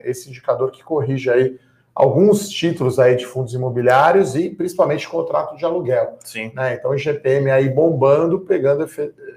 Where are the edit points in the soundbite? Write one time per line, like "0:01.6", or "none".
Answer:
none

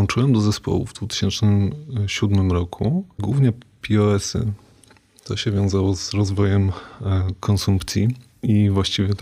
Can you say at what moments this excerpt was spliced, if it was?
0:03.2

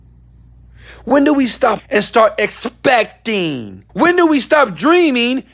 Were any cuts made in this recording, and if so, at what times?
0:01.8
0:03.9

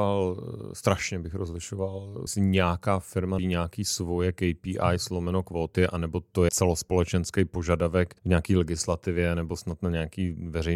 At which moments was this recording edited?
0:02.3
0:03.4
0:06.5
0:08.2

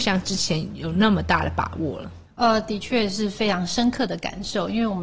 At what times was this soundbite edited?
0:02.3

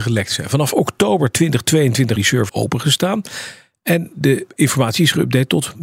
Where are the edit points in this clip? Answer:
0:02.2
0:02.5
0:04.5

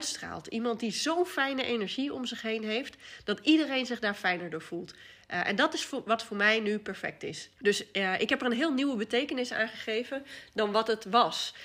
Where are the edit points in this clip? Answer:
0:07.5

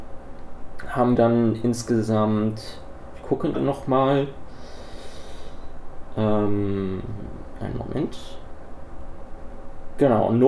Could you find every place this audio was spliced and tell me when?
0:01.2
0:03.5

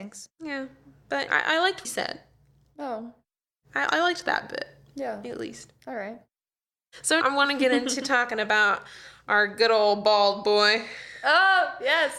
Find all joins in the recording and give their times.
0:01.3
0:01.8
0:07.2

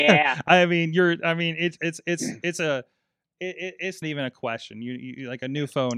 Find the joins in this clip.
0:01.8
0:04.0

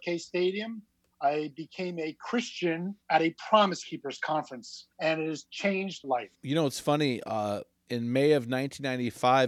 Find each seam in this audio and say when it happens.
0:03.0
0:04.9
0:06.0
0:06.3

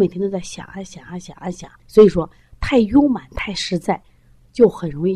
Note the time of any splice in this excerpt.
0:01.8

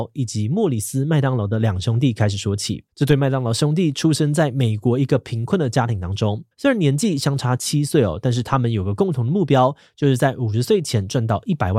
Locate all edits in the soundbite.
0:02.9
0:06.5

